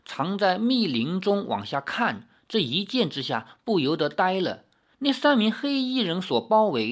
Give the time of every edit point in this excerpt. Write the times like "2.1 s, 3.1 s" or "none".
none